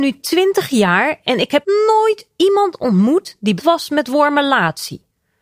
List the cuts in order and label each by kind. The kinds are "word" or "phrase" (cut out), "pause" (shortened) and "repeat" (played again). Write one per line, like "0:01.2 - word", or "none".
0:01.6 - word
0:03.6 - word